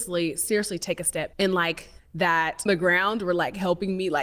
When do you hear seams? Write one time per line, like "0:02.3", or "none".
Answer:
0:01.3
0:02.0
0:02.7